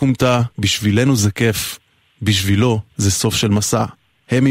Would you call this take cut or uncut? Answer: uncut